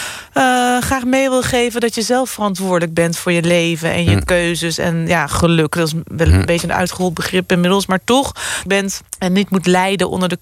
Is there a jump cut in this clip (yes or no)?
yes